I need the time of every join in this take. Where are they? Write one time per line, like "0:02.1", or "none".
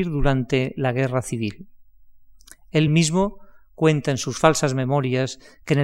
none